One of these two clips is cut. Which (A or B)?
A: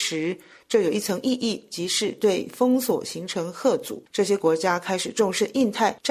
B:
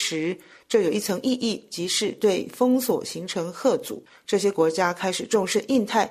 A